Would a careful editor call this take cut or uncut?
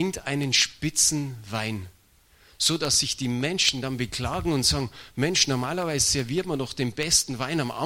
uncut